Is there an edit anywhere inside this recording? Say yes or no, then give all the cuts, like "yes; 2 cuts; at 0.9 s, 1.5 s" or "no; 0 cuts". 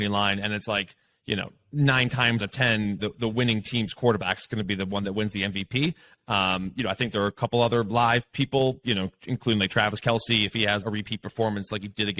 yes; 3 cuts; at 2.4 s, 3.0 s, 10.8 s